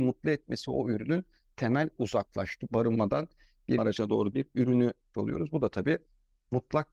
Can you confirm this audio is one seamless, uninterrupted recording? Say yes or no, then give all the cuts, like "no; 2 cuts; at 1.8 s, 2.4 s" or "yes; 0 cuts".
no; 6 cuts; at 1.5 s, 2.0 s, 2.7 s, 3.8 s, 4.3 s, 5.1 s